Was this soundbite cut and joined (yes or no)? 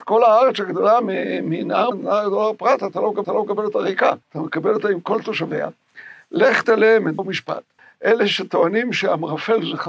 yes